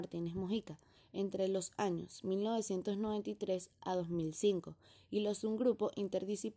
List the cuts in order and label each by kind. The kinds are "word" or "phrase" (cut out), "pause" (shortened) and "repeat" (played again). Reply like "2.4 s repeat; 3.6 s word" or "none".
none